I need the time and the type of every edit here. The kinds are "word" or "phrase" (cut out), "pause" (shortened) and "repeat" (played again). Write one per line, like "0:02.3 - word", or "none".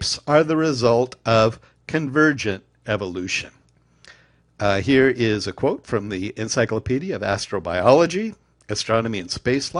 none